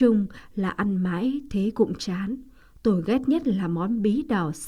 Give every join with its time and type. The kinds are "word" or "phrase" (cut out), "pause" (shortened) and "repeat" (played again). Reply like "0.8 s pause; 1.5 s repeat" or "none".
none